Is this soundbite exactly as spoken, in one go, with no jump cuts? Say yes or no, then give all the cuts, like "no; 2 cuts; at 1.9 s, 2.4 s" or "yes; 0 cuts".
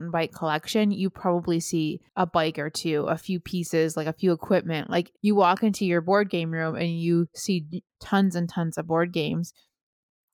no; 3 cuts; at 2.1 s, 5.2 s, 7.9 s